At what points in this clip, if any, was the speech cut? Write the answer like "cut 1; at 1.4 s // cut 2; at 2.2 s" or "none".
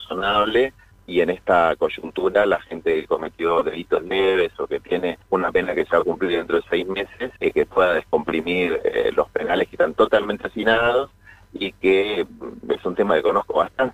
cut 1; at 0.9 s // cut 2; at 5.2 s // cut 3; at 7.4 s